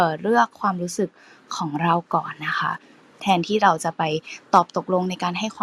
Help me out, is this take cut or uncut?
uncut